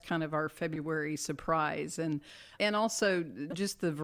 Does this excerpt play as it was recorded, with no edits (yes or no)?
no